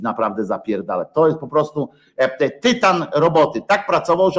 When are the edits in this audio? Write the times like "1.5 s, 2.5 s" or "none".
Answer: none